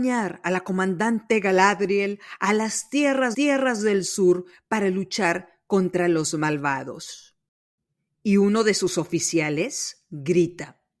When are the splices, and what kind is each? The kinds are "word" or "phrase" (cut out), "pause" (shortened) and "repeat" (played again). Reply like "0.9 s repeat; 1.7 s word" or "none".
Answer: 3.3 s repeat